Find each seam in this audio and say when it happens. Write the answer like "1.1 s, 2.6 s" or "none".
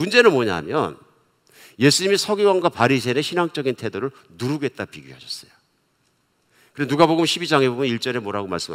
none